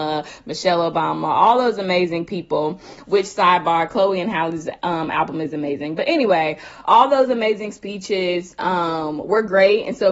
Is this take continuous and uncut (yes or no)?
yes